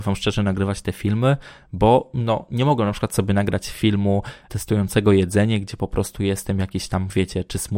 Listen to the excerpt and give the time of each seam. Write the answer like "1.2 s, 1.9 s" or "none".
none